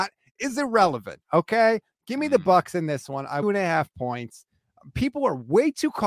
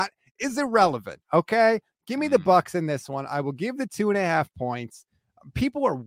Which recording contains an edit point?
first; 1 cut; at 3.4 s

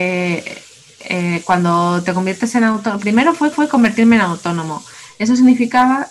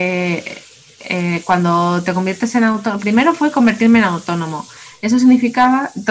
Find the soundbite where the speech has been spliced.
first; 1 cut; at 3.5 s

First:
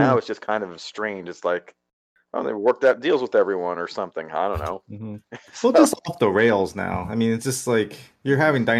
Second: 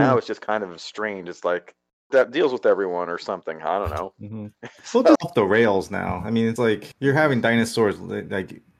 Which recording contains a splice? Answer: second; 4 cuts; at 2.1 s, 5.2 s, 6.6 s, 6.9 s

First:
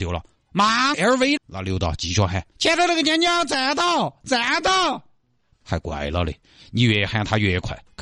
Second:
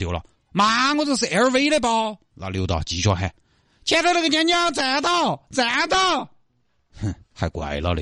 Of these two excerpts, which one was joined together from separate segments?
first; 4 cuts; at 0.9 s, 1.4 s, 2.5 s, 5.5 s

